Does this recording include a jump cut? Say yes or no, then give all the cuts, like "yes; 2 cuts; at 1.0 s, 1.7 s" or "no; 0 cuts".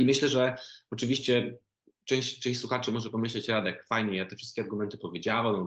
no; 0 cuts